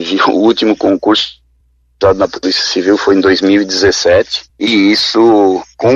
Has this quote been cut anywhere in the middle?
no; 0 cuts

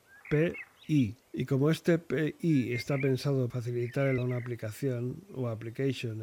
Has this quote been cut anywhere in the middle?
yes; 3 cuts; at 1.2 s, 3.5 s, 4.2 s

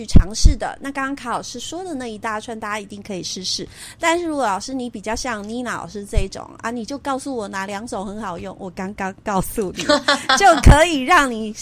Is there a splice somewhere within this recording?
no; 0 cuts

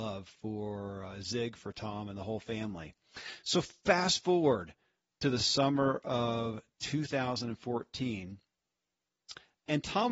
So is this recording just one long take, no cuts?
yes; 0 cuts

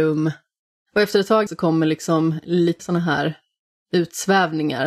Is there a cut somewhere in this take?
yes; 2 cuts; at 1.5 s, 2.8 s

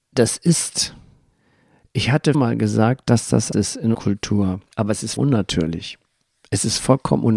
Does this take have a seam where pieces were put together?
yes; 6 cuts; at 1.3 s, 2.3 s, 3.5 s, 3.9 s, 4.7 s, 5.2 s

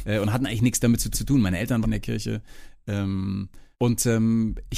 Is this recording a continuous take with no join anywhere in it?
no; 3 cuts; at 1.1 s, 1.8 s, 3.7 s

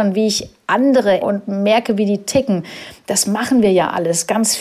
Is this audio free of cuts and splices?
no; 1 cut; at 1.2 s

